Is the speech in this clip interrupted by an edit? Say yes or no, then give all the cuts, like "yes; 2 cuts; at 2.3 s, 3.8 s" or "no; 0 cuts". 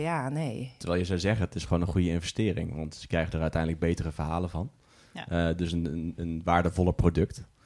no; 0 cuts